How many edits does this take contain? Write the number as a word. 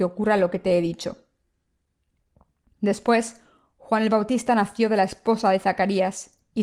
zero